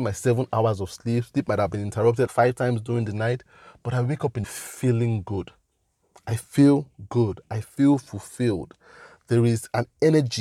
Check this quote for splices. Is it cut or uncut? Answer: cut